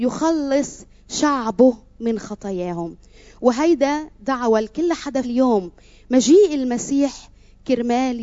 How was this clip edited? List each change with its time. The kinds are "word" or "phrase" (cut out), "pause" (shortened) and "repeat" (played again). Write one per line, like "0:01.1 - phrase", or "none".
0:05.2 - word